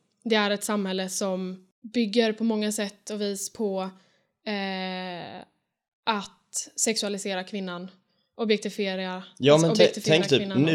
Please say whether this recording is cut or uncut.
uncut